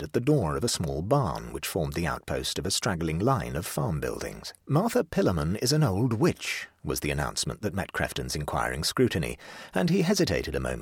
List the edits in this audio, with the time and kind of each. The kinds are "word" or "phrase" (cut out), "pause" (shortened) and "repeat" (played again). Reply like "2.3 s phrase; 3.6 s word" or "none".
4.6 s pause